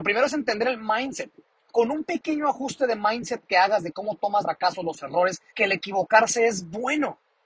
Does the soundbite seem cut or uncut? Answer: cut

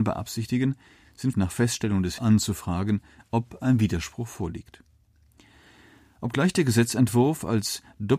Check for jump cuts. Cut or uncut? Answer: cut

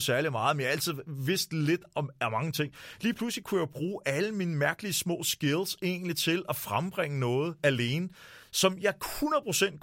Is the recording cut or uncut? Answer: uncut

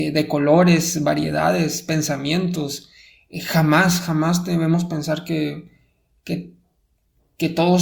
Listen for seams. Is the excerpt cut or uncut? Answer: uncut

